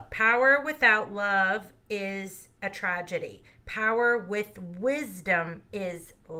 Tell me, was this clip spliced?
no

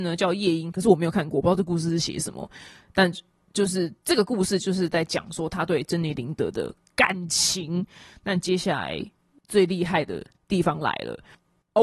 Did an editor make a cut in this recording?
no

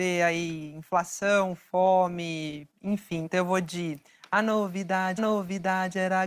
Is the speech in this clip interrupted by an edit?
yes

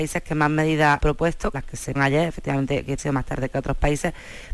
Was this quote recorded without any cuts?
no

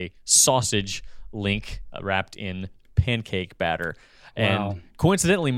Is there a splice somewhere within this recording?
no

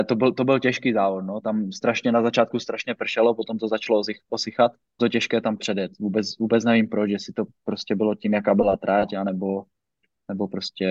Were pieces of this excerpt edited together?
yes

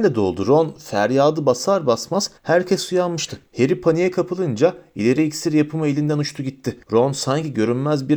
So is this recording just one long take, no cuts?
no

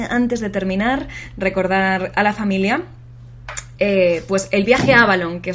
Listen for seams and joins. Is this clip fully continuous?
yes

